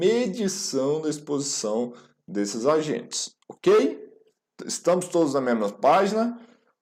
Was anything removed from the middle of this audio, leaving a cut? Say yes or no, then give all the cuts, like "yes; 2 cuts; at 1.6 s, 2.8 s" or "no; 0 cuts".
yes; 1 cut; at 3.4 s